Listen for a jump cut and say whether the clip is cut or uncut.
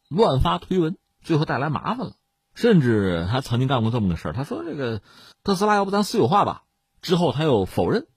uncut